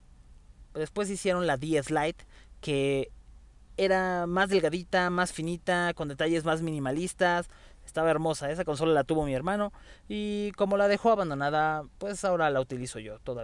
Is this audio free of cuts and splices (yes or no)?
yes